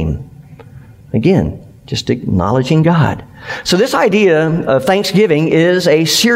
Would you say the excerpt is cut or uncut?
uncut